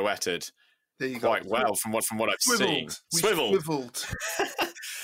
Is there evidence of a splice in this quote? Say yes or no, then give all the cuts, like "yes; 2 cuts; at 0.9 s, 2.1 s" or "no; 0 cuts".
yes; 2 cuts; at 2.0 s, 3.0 s